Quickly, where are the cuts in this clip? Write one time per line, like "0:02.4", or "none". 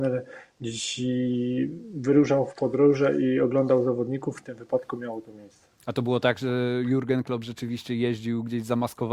0:05.8